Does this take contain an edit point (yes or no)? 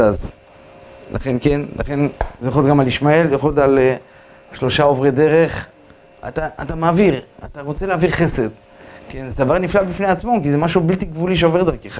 no